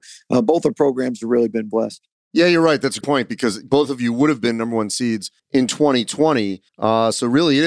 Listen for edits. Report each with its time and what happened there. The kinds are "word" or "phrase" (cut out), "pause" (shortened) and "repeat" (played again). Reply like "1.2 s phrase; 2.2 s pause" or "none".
3.0 s word; 5.4 s pause; 6.7 s pause